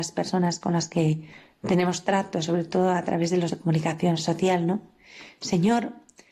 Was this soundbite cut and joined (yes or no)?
yes